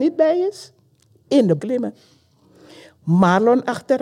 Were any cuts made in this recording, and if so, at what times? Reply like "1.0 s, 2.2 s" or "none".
1.6 s